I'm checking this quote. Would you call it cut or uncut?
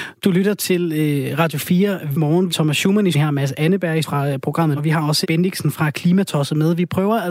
cut